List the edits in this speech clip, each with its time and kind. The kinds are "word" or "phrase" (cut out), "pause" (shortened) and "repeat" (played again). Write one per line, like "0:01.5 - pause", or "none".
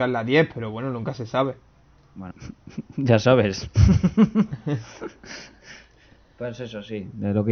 0:02.3 - word